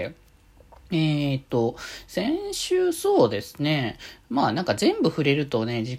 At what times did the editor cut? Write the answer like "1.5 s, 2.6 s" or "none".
none